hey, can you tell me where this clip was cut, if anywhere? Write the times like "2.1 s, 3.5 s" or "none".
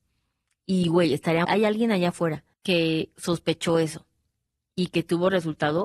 1.4 s, 2.5 s

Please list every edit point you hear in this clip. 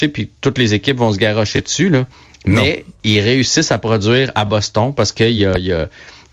none

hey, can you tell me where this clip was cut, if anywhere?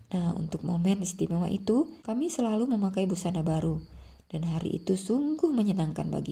2.0 s

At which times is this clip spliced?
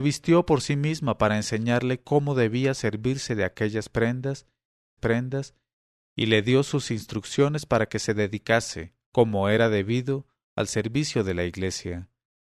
5.0 s

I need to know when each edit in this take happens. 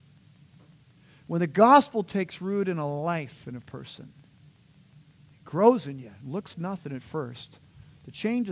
6.5 s

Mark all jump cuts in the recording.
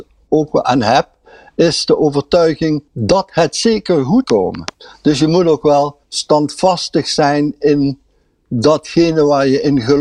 2.9 s, 4.2 s, 6.0 s

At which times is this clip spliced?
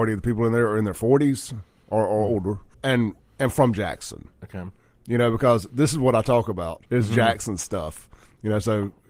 2.7 s, 4.3 s, 6.9 s

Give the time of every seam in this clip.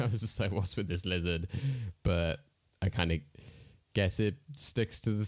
none

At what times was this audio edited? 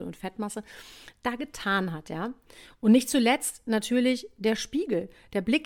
none

